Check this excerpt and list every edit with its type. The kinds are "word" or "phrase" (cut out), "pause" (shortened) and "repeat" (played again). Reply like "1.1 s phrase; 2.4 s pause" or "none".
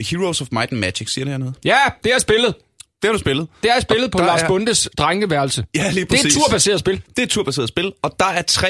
none